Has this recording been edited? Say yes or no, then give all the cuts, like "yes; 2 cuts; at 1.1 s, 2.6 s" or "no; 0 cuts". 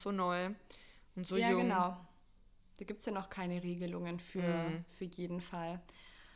no; 0 cuts